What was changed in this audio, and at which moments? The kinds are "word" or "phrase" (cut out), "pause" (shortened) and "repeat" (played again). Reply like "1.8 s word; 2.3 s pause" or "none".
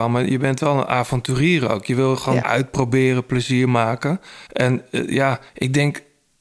2.4 s word; 4.5 s pause; 5.5 s pause